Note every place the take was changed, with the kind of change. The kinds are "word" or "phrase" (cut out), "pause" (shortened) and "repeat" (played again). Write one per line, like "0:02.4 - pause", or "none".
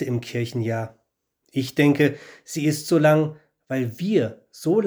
none